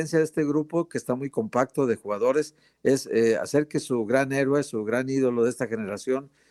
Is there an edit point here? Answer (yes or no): no